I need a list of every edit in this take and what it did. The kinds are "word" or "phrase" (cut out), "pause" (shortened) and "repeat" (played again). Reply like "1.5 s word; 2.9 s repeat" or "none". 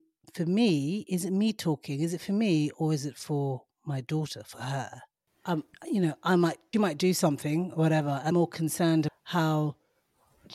6.7 s word; 8.3 s word; 9.1 s word